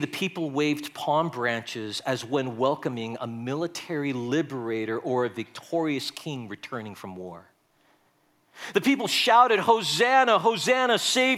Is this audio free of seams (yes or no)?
yes